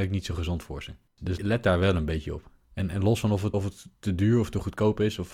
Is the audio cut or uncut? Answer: cut